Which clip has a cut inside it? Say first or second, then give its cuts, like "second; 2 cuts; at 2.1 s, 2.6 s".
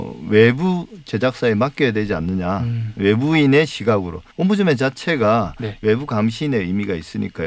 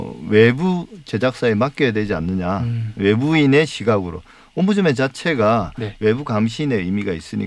first; 1 cut; at 4.3 s